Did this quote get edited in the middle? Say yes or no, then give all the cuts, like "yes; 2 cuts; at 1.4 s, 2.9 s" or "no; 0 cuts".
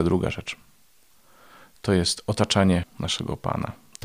yes; 1 cut; at 2.8 s